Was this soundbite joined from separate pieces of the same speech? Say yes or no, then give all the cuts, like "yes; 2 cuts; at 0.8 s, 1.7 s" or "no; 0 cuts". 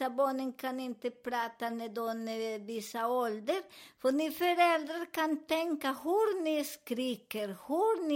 no; 0 cuts